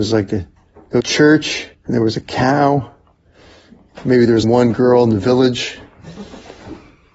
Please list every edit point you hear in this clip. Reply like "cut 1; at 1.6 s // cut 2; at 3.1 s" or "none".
cut 1; at 1.0 s // cut 2; at 1.7 s // cut 3; at 4.4 s